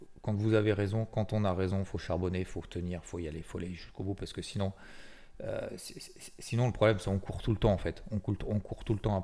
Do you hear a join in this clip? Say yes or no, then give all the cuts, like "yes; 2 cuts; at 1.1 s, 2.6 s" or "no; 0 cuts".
no; 0 cuts